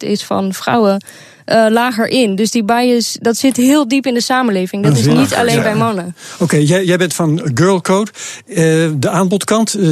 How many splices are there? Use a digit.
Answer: 0